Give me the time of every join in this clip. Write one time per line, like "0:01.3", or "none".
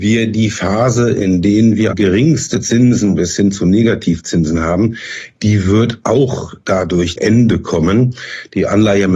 0:01.9
0:07.2